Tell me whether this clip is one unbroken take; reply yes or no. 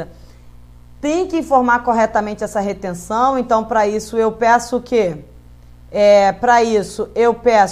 yes